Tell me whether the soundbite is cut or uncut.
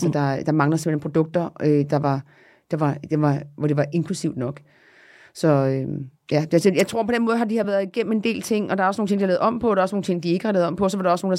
uncut